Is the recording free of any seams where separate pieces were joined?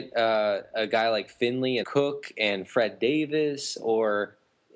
no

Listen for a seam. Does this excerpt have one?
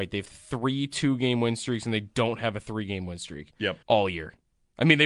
yes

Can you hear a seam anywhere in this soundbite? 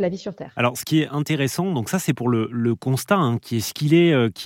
no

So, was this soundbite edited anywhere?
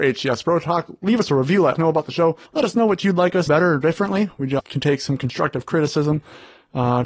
yes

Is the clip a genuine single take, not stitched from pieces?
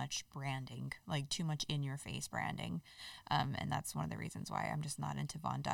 yes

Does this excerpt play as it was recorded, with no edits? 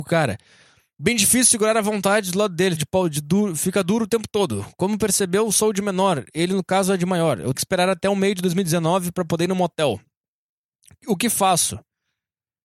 no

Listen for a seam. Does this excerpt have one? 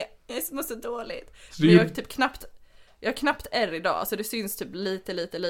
no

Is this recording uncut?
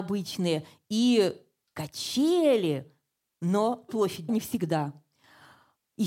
no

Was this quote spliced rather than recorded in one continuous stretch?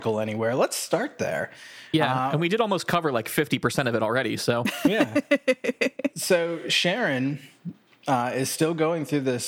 no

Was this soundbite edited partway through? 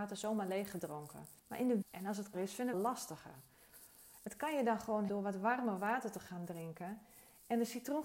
yes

